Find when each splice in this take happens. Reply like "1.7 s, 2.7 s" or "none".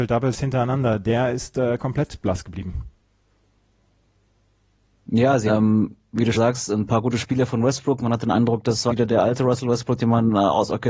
5.5 s, 6.3 s, 8.9 s